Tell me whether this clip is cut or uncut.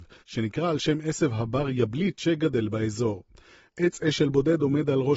uncut